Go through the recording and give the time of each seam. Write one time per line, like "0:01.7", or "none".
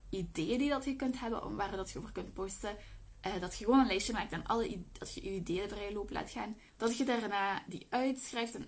0:06.7